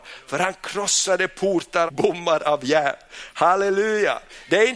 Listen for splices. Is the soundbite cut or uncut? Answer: cut